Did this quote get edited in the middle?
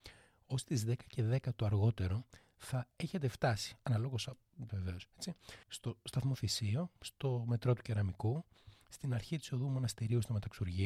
yes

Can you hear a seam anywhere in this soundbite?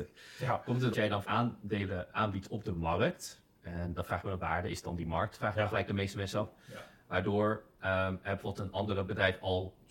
yes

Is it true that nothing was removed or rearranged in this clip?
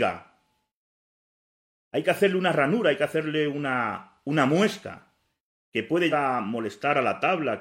no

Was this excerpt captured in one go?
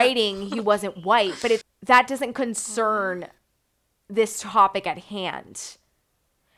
no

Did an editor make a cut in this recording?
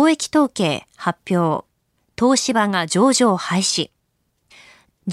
yes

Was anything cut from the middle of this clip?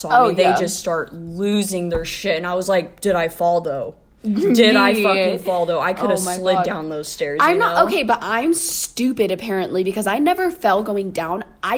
no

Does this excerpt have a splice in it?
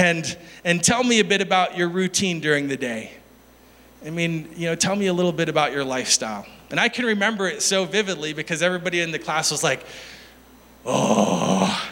no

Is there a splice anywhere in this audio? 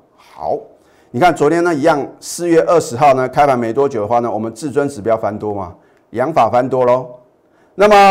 no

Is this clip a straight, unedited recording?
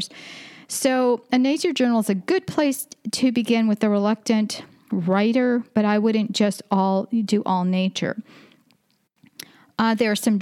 yes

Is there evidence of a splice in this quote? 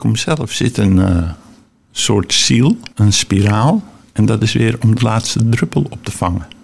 yes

